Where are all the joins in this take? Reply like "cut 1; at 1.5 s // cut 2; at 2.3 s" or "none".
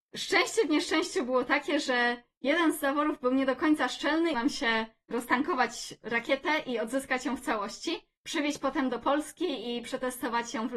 cut 1; at 4.3 s // cut 2; at 8.2 s